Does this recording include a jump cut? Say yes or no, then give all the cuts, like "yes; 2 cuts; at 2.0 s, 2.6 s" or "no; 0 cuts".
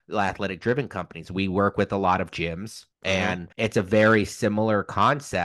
yes; 2 cuts; at 2.9 s, 3.5 s